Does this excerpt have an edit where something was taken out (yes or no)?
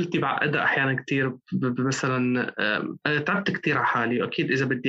no